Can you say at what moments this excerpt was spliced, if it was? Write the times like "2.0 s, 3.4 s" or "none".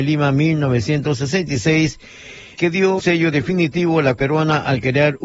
2.6 s, 3.0 s, 4.2 s